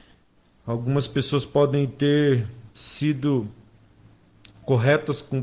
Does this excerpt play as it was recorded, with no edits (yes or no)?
yes